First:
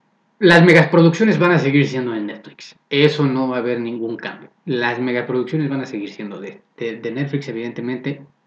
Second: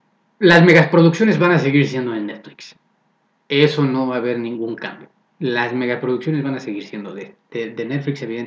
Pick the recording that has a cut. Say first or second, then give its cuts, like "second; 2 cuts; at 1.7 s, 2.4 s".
first; 2 cuts; at 2.8 s, 4.6 s